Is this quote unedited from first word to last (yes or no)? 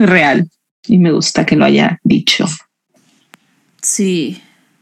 yes